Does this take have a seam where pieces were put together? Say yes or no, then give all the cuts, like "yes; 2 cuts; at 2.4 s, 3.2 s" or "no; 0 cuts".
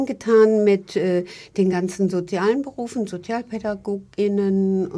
no; 0 cuts